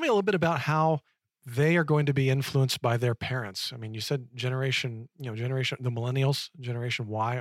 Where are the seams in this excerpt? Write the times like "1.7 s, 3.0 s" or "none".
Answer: 1.1 s